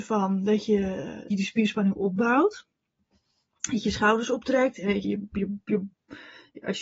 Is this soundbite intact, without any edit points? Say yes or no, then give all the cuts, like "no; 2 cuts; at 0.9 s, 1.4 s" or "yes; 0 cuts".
no; 2 cuts; at 1.3 s, 5.0 s